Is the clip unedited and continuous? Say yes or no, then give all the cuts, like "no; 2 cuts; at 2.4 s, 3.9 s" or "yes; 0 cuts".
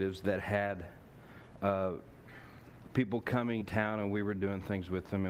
no; 1 cut; at 3.6 s